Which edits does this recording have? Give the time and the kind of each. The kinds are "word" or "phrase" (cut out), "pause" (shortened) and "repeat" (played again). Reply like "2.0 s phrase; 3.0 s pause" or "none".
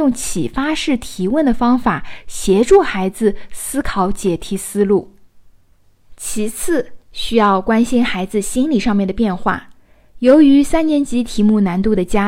none

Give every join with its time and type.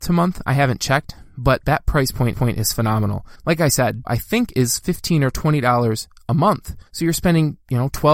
2.3 s repeat; 3.4 s pause; 4.0 s word; 6.9 s pause

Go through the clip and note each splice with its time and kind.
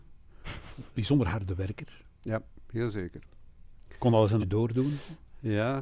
0.9 s word; 4.4 s word

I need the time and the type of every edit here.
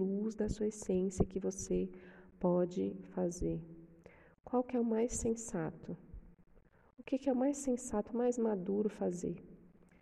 none

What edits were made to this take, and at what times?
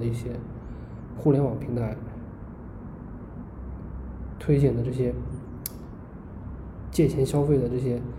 1.2 s word

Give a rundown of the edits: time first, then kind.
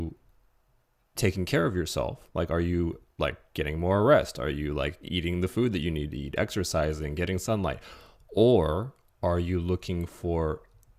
none

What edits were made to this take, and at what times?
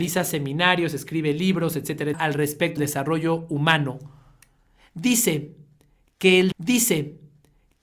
2.1 s word; 2.8 s word; 6.5 s repeat

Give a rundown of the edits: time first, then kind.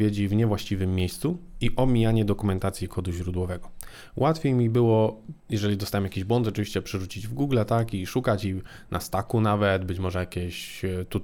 5.4 s pause

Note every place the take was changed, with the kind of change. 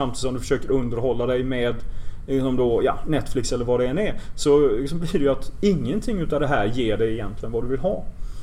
none

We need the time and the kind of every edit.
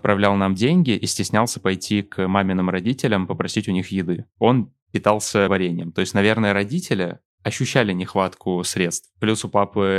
5.5 s word

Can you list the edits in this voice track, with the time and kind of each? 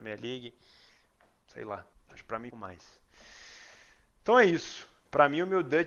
1.9 s pause; 2.5 s phrase

